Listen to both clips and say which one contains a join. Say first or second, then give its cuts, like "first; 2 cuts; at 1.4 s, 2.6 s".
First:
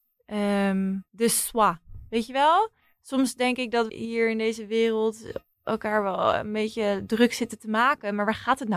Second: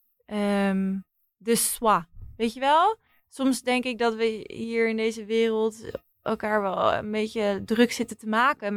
first; 2 cuts; at 1.1 s, 3.9 s